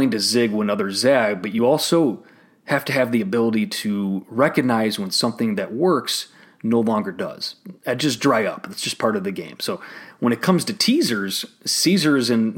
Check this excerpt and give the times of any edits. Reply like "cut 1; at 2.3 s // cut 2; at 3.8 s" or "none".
none